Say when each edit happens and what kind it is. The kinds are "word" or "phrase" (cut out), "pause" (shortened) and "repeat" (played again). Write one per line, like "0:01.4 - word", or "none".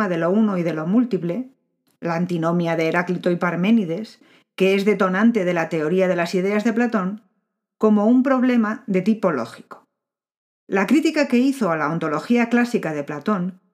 none

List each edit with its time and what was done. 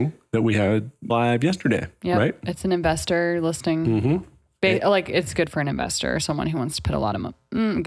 0:01.1 - word

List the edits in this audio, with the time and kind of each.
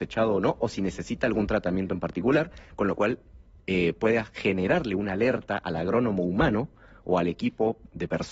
none

